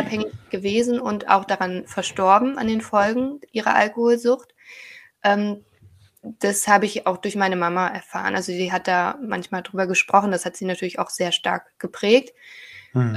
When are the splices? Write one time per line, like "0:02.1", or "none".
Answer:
none